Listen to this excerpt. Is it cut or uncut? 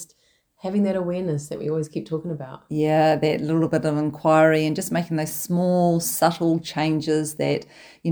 uncut